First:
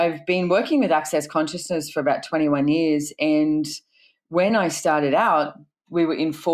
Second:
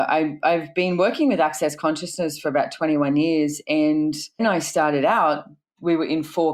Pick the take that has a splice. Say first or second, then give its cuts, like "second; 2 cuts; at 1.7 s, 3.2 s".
second; 1 cut; at 4.4 s